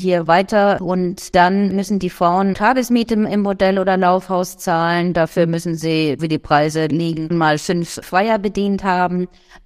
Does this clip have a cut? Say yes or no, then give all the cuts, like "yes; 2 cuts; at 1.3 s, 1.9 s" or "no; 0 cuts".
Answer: yes; 3 cuts; at 2.5 s, 6.2 s, 7.3 s